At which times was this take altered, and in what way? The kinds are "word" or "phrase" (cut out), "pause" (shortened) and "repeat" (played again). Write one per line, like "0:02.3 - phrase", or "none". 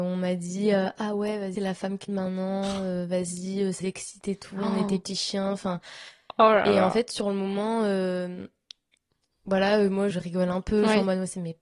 0:01.5 - word
0:02.1 - word
0:03.8 - word
0:10.1 - word